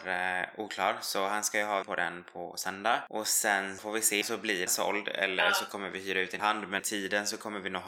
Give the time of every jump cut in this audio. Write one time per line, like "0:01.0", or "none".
0:01.8
0:03.8
0:04.2
0:04.7
0:06.4
0:06.8